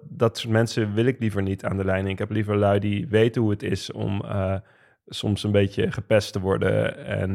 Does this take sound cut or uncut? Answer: uncut